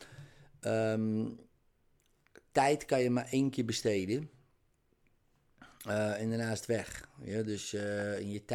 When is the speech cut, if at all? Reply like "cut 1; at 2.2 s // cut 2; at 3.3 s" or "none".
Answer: none